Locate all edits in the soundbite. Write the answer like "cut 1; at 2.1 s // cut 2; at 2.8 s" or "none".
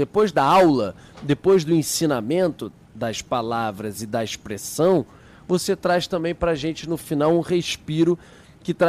none